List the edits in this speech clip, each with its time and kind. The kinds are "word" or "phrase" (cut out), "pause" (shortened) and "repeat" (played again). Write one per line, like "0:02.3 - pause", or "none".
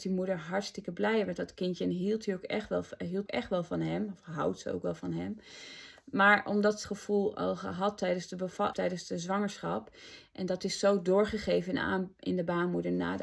0:03.3 - phrase
0:06.8 - phrase
0:08.7 - word